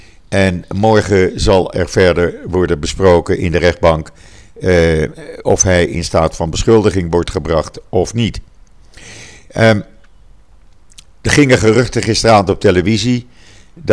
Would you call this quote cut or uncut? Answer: uncut